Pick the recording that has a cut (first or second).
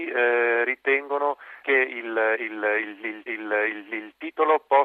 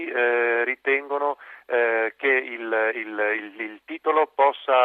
first